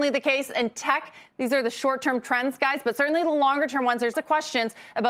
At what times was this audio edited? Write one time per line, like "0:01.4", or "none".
0:04.1